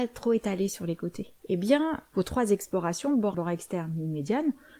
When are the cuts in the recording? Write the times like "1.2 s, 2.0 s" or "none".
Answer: 1.4 s, 3.3 s